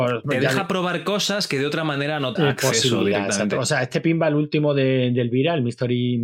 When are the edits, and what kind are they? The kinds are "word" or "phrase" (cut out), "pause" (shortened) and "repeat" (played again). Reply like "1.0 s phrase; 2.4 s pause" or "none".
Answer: 2.4 s word